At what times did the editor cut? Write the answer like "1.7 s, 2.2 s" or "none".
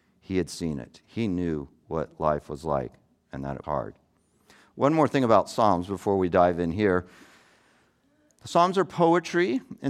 3.6 s